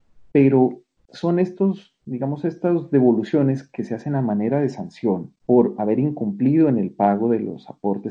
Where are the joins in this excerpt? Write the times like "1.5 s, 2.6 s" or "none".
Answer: 2.0 s, 5.4 s

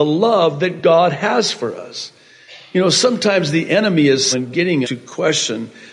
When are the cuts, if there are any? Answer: 4.3 s, 4.8 s

